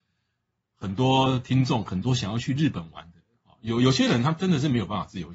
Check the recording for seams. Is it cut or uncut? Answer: uncut